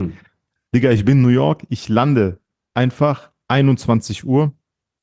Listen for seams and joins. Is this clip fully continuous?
yes; 0 cuts

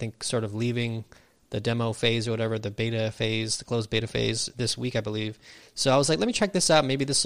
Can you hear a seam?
no; 0 cuts

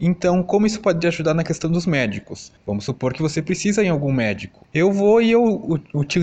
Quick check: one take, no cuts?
yes; 0 cuts

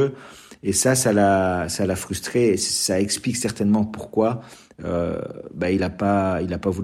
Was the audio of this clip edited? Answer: no; 0 cuts

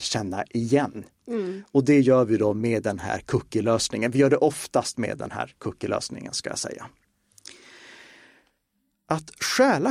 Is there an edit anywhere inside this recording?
no; 0 cuts

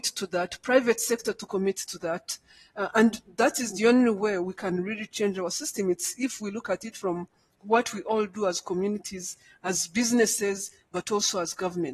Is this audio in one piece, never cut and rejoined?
yes; 0 cuts

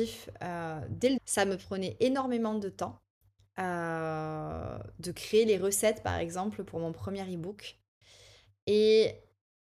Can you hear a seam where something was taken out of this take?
yes; 1 cut; at 1.2 s

